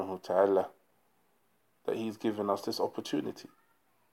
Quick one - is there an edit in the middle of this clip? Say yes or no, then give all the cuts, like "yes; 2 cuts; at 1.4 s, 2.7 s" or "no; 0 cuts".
no; 0 cuts